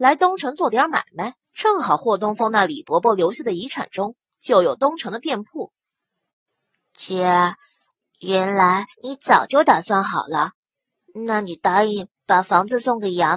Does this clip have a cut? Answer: yes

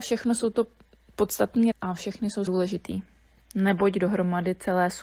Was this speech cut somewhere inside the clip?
yes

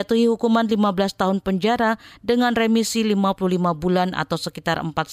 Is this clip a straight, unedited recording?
yes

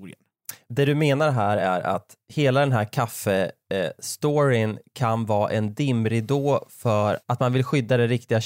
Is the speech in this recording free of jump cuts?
yes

